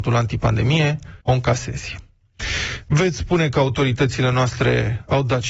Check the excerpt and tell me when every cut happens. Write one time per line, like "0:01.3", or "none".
0:01.2